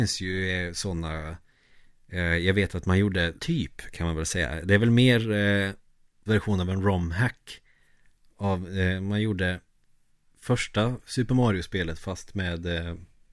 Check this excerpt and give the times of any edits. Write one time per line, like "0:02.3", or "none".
0:03.4
0:06.3